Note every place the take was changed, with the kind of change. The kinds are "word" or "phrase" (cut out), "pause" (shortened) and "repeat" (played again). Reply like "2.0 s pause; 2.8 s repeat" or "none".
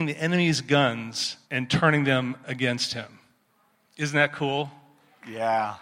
1.4 s pause